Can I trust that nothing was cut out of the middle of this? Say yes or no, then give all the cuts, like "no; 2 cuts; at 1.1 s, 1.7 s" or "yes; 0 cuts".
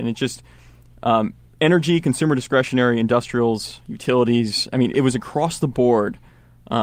no; 2 cuts; at 1.5 s, 4.9 s